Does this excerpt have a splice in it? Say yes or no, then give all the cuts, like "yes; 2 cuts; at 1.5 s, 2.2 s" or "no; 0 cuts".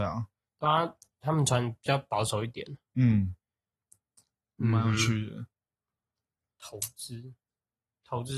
no; 0 cuts